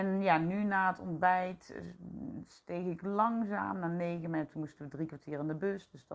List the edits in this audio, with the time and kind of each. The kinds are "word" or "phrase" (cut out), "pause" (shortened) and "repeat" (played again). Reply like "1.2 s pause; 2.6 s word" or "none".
none